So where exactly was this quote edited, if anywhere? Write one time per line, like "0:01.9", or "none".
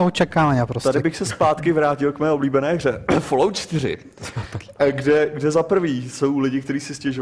none